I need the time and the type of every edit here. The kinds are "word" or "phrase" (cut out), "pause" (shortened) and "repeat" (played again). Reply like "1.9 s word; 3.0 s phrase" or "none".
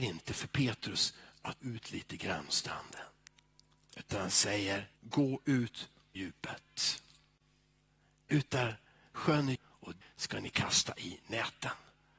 1.6 s word; 2.5 s word; 5.0 s pause; 6.1 s word; 9.5 s word; 10.0 s word

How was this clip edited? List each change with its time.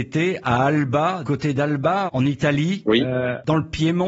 1.2 s word; 2.1 s word

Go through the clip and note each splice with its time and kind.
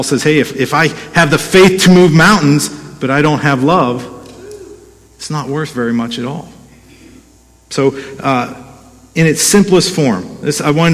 none

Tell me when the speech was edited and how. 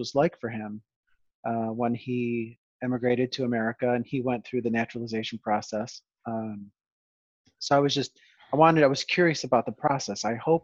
none

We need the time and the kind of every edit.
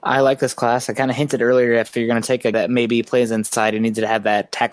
2.5 s word

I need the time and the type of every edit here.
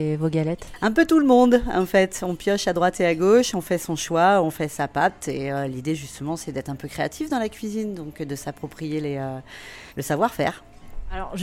9.9 s pause

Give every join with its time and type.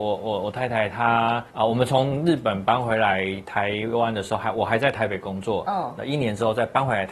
1.5 s pause

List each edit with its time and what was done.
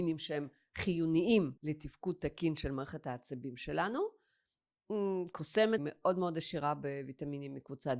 1.6 s pause; 5.8 s phrase

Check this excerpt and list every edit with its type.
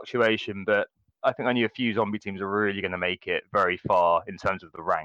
none

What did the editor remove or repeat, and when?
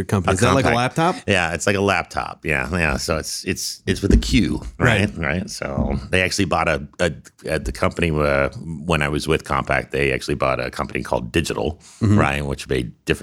none

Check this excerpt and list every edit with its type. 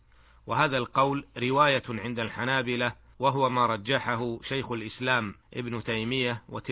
3.1 s pause; 5.4 s pause

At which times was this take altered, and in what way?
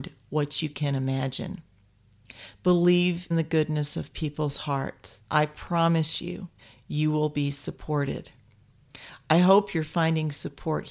3.3 s phrase; 5.2 s pause; 6.6 s pause

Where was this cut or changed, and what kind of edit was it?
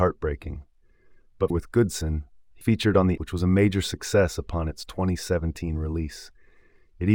1.5 s phrase; 2.6 s word; 3.2 s phrase

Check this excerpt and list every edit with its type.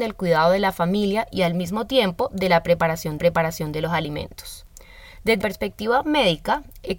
3.2 s repeat; 5.4 s word

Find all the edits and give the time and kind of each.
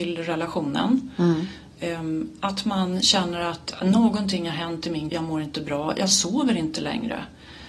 5.1 s word

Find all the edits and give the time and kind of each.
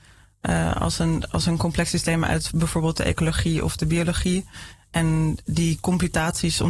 5.5 s word

